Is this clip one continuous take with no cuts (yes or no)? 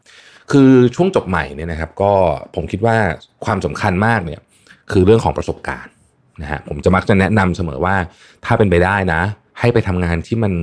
yes